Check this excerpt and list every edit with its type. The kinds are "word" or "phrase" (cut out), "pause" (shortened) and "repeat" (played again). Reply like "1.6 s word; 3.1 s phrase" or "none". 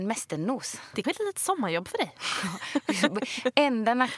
1.0 s word